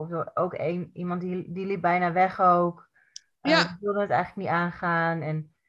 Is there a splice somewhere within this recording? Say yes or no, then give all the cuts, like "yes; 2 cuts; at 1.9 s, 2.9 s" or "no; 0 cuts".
no; 0 cuts